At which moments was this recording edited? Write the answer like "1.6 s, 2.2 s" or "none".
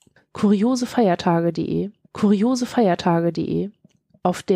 2.0 s